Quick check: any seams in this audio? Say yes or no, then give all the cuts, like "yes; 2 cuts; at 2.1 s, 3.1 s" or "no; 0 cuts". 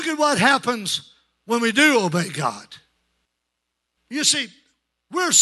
no; 0 cuts